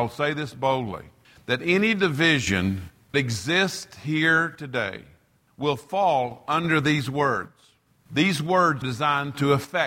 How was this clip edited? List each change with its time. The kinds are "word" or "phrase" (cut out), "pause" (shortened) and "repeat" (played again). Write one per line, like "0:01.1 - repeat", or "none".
0:03.1 - word
0:08.8 - word